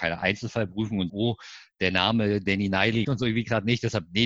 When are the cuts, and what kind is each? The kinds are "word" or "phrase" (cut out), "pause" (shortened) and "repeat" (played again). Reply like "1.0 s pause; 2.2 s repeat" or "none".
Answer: 1.1 s word; 3.0 s word